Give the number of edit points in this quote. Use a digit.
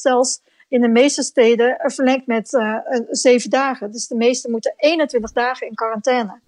1